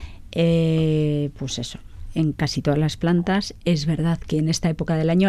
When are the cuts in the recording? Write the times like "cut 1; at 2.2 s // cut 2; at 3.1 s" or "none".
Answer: none